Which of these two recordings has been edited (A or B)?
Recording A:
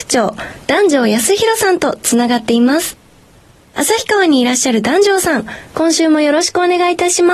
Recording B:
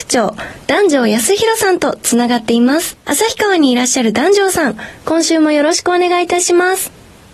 B